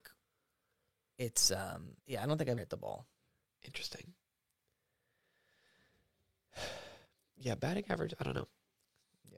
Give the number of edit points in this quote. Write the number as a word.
three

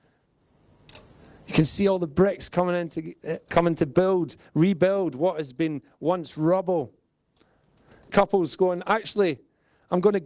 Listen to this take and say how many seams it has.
two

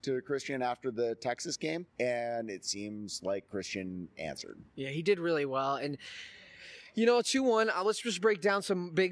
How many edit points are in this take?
one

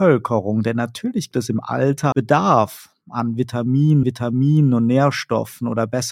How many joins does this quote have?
three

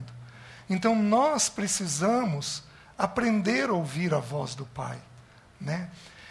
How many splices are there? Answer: zero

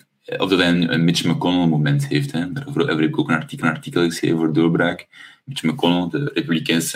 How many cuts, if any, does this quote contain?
one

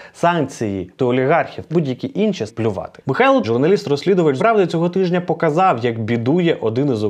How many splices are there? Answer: five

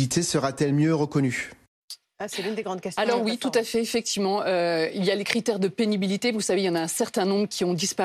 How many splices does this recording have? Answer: zero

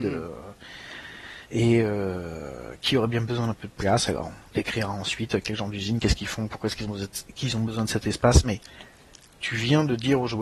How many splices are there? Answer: one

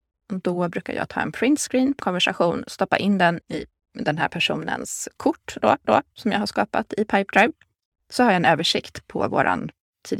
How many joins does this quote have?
three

